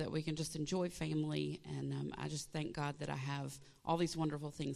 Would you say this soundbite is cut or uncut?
uncut